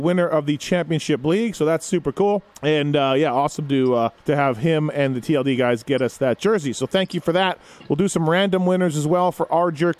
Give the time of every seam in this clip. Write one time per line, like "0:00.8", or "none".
0:02.5
0:04.2